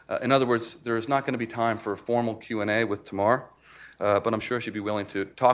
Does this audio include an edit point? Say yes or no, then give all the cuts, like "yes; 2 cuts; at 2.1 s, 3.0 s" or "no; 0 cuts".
no; 0 cuts